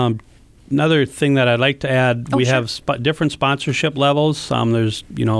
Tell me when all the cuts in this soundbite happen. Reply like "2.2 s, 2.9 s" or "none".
none